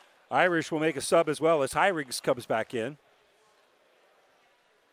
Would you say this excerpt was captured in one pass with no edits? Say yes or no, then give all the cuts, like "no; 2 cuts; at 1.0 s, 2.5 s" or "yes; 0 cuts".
yes; 0 cuts